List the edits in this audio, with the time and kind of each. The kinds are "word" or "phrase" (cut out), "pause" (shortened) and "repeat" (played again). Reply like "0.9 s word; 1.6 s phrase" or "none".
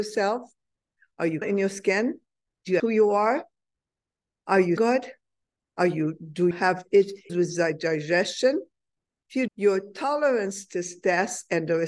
1.4 s word; 2.8 s word; 4.8 s word; 6.5 s word; 7.3 s word; 9.5 s word